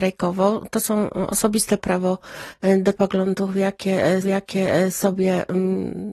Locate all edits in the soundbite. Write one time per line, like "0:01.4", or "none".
0:01.8
0:03.0
0:04.2